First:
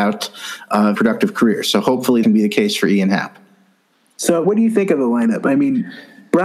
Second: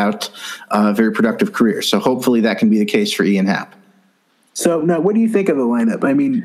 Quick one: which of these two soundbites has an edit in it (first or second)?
first